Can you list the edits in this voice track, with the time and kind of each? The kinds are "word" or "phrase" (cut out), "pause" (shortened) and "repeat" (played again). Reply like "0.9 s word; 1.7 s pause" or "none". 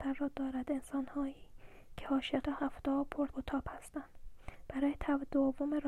2.4 s word; 3.3 s word